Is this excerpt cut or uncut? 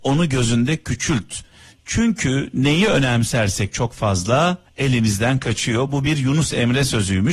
cut